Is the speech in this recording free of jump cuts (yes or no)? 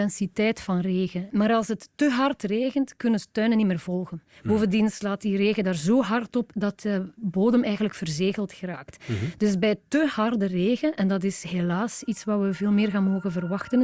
yes